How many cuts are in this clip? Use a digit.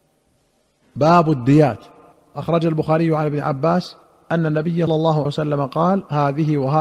4